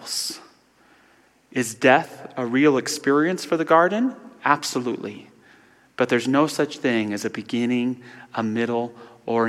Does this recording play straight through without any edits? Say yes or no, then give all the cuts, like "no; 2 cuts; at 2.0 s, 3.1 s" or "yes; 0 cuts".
yes; 0 cuts